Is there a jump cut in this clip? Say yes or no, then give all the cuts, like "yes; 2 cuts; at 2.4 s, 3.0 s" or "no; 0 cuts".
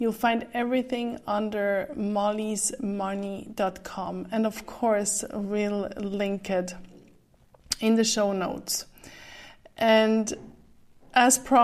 no; 0 cuts